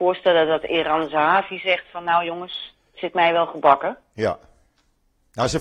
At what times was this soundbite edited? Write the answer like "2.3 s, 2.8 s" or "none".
none